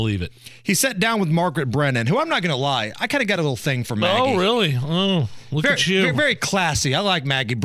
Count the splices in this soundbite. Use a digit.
0